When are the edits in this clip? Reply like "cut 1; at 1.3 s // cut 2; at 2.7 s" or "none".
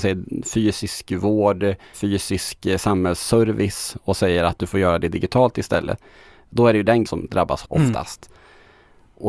cut 1; at 1.9 s // cut 2; at 7.1 s // cut 3; at 7.6 s